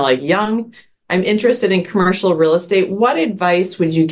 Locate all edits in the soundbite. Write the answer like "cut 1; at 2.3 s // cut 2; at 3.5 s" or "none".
none

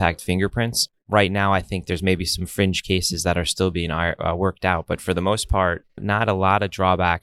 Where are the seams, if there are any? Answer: none

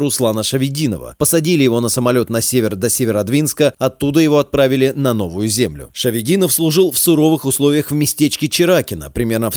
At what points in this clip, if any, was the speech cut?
none

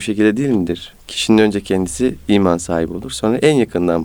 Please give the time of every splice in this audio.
none

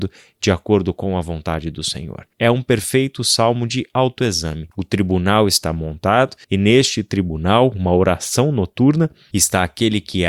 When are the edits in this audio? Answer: cut 1; at 2.3 s // cut 2; at 4.7 s // cut 3; at 6.4 s

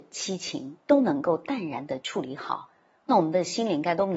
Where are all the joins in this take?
none

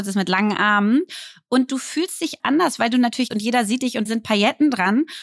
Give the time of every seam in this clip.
cut 1; at 2.4 s // cut 2; at 3.3 s // cut 3; at 4.1 s

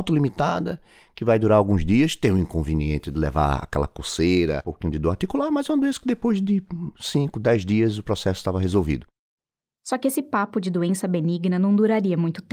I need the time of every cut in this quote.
none

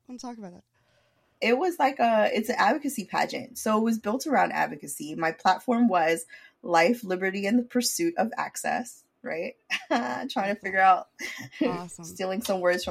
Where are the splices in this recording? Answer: none

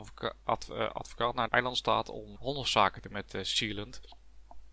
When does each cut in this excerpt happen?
cut 1; at 1.5 s // cut 2; at 2.3 s // cut 3; at 3.0 s

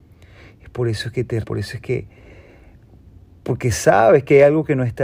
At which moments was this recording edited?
cut 1; at 1.4 s

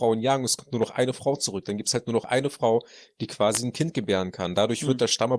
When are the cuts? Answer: none

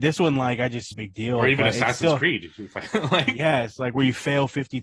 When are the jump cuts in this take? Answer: cut 1; at 0.9 s

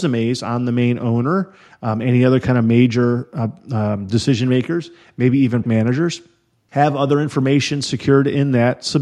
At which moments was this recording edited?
cut 1; at 5.6 s

